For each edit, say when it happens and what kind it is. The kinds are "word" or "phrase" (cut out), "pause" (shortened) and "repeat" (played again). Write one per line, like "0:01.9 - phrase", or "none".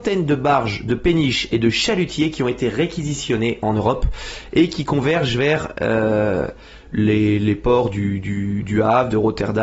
none